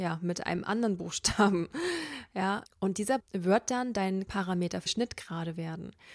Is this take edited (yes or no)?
yes